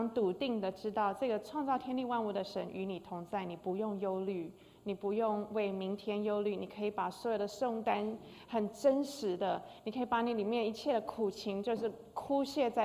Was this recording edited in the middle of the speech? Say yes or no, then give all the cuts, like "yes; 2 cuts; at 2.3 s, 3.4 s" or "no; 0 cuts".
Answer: no; 0 cuts